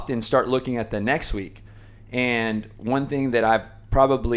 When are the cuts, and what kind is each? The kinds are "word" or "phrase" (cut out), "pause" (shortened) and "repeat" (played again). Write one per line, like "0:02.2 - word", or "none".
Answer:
none